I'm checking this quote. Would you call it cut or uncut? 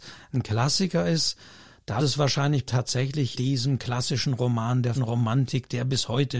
cut